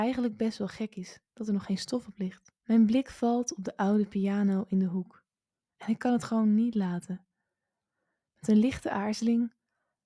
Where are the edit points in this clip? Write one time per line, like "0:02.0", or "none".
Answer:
0:02.6